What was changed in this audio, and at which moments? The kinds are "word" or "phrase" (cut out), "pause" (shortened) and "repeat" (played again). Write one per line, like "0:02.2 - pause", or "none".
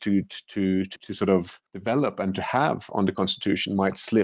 0:01.0 - word
0:01.7 - pause